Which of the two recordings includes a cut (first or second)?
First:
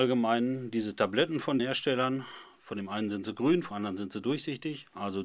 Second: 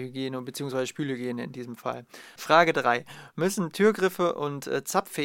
first